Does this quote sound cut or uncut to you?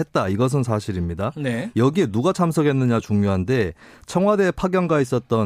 uncut